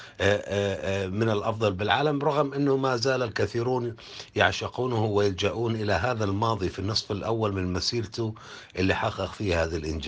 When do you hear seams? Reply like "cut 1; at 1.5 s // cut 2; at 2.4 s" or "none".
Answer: none